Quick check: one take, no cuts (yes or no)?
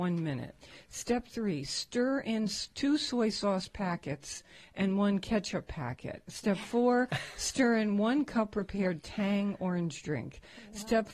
yes